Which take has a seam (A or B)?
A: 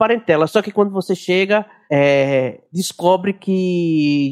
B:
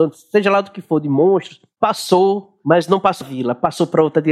B